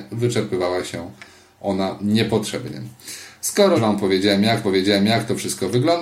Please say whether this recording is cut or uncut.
cut